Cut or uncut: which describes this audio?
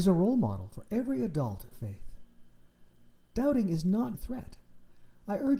cut